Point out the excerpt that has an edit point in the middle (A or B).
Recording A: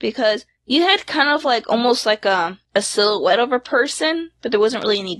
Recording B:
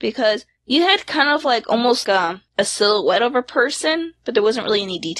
B